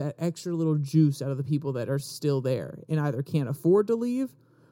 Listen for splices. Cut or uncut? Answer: uncut